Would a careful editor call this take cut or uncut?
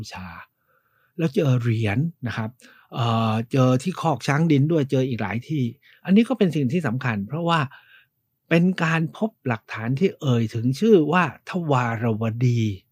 cut